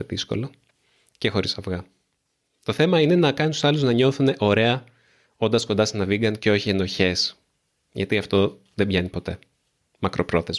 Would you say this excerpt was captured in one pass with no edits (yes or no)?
yes